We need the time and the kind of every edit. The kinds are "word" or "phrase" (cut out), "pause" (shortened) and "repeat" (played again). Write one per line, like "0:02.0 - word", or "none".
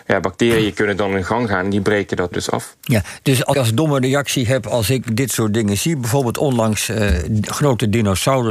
0:02.3 - word
0:03.5 - word